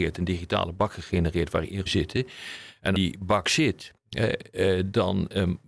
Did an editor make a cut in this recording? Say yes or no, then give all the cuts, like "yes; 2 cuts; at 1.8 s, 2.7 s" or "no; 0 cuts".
yes; 2 cuts; at 1.9 s, 2.9 s